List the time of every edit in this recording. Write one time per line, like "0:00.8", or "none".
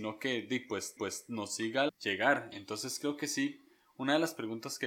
0:01.0
0:01.9